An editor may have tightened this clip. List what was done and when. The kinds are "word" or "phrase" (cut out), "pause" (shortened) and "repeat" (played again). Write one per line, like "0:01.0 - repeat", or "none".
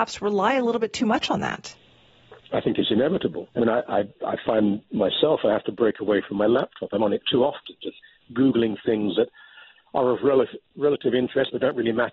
0:03.5 - pause